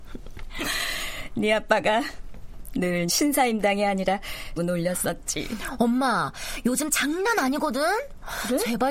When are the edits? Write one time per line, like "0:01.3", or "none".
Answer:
0:03.1
0:04.6
0:06.9